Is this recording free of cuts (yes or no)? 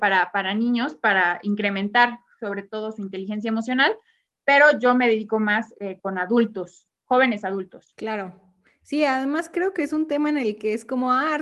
yes